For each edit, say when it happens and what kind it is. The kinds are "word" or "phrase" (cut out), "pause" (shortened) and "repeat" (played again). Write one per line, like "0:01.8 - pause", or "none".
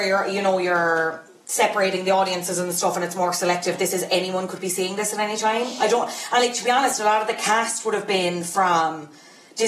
none